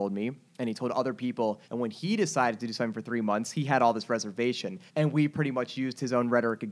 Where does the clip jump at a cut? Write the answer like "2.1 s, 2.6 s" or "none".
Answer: 1.6 s, 4.9 s